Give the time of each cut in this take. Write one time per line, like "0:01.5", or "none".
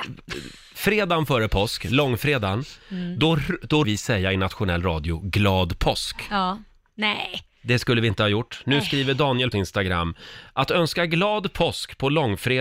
0:03.8
0:09.5